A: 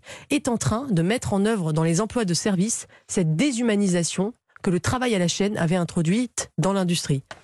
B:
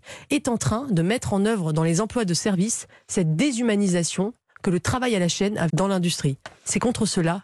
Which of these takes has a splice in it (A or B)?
B